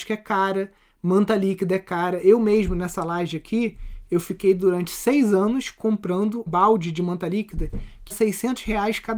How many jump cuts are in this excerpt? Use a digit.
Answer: 2